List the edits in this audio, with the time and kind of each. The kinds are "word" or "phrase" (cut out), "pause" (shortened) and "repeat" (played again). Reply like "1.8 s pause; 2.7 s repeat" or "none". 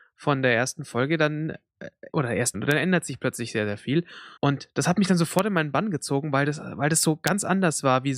2.1 s word; 2.5 s phrase; 4.4 s pause